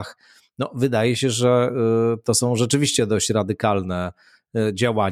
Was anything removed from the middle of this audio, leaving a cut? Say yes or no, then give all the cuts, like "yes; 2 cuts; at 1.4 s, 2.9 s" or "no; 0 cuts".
no; 0 cuts